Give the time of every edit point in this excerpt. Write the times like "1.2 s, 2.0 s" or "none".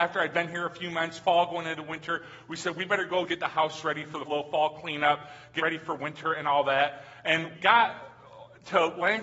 3.3 s, 4.3 s, 5.6 s, 7.5 s